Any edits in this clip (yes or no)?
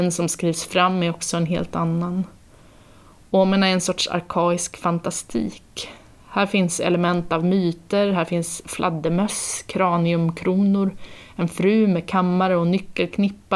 no